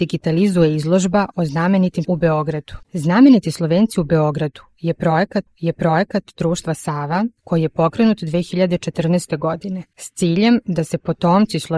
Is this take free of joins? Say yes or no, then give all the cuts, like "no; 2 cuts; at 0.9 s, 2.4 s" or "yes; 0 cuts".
no; 4 cuts; at 2.0 s, 2.8 s, 5.5 s, 7.4 s